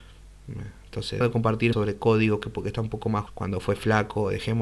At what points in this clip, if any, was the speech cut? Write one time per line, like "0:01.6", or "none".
0:01.2
0:01.7
0:03.3